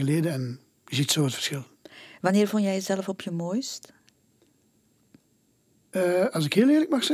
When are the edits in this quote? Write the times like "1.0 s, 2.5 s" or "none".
none

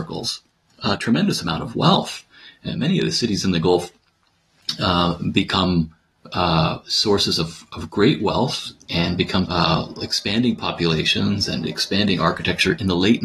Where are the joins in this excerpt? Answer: 9.4 s

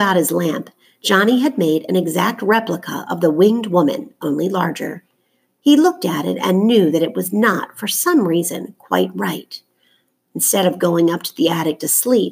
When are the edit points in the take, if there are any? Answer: none

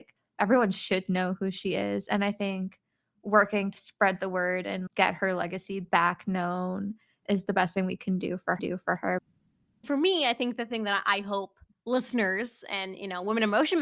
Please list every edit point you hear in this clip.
3.7 s, 4.9 s, 8.6 s

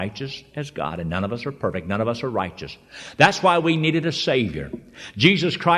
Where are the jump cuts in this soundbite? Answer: none

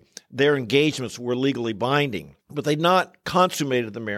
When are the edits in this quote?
2.4 s

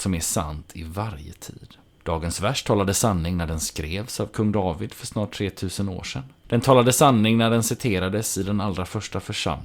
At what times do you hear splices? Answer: none

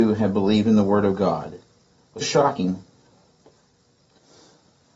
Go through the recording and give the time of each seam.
2.2 s

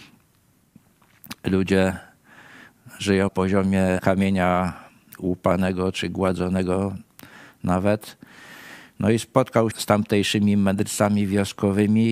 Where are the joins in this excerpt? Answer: 3.3 s, 4.0 s, 9.7 s

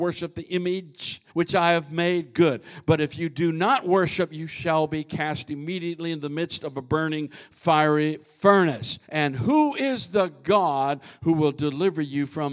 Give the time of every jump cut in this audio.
1.3 s, 9.0 s

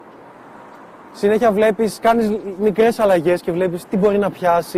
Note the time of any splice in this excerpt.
none

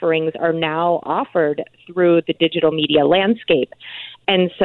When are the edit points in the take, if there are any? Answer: none

